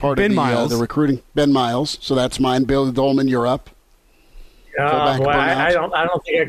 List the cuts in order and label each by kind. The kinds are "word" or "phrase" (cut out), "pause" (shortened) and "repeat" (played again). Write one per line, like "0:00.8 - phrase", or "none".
none